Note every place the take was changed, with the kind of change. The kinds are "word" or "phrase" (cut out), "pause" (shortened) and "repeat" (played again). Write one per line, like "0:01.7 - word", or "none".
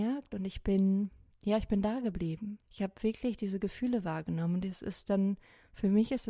0:02.6 - pause